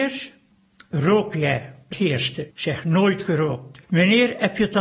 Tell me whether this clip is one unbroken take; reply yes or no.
no